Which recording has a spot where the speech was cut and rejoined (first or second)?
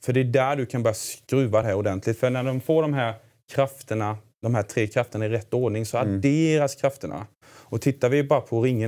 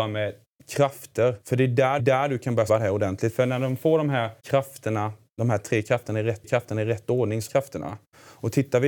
second